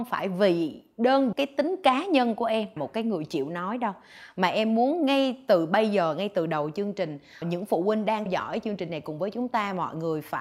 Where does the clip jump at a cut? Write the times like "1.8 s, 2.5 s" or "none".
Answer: 1.3 s, 2.8 s, 7.4 s, 8.3 s